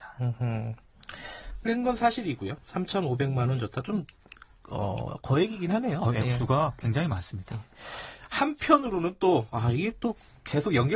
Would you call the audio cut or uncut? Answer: cut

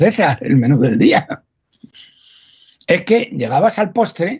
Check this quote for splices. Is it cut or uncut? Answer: uncut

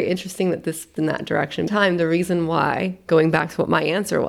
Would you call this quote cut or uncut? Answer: cut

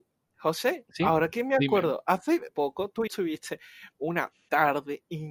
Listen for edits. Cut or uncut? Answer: cut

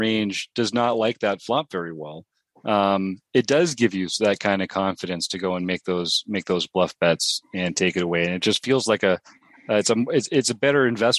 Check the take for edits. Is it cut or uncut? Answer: uncut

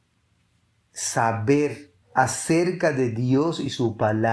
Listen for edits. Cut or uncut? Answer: cut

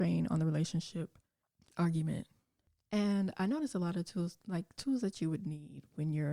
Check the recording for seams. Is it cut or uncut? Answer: uncut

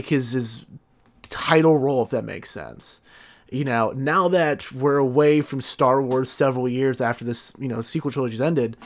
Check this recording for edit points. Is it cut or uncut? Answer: uncut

